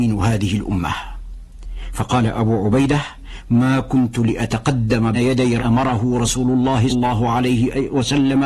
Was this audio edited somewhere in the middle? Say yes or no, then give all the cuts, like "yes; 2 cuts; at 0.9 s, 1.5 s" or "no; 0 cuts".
yes; 3 cuts; at 5.1 s, 5.6 s, 6.9 s